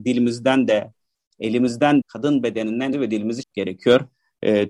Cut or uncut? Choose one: cut